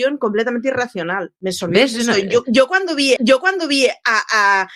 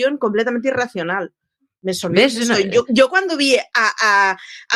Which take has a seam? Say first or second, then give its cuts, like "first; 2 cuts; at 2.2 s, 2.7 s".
first; 2 cuts; at 1.4 s, 3.2 s